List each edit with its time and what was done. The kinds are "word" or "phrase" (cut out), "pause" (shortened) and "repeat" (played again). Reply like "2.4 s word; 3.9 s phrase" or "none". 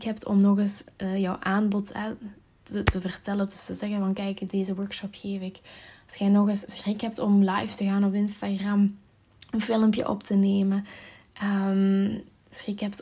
none

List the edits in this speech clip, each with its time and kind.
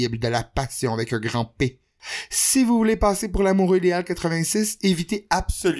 none

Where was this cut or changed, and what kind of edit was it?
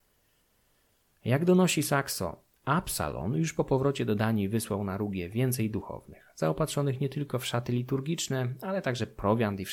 none

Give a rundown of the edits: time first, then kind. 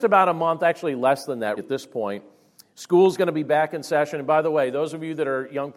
1.6 s word

